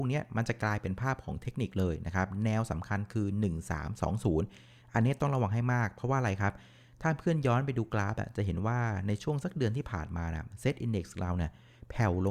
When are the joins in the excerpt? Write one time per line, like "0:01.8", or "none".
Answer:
none